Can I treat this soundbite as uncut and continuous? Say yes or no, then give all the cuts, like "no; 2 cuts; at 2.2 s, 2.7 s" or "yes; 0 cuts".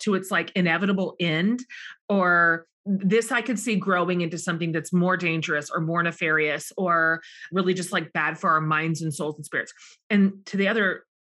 yes; 0 cuts